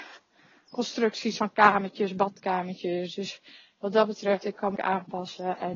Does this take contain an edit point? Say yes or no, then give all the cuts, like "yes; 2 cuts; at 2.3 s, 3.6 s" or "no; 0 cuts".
yes; 1 cut; at 4.8 s